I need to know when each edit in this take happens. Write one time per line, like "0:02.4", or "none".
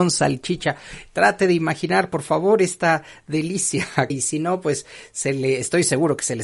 0:04.1

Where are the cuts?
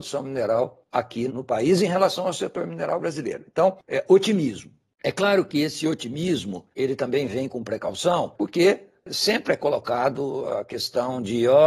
0:01.3
0:06.7

